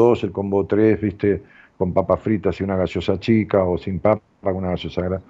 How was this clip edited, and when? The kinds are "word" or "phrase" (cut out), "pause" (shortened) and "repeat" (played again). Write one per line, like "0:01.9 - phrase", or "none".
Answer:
none